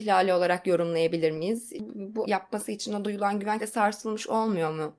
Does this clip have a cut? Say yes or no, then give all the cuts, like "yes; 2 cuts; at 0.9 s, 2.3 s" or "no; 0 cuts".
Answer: yes; 3 cuts; at 2.2 s, 3.0 s, 3.6 s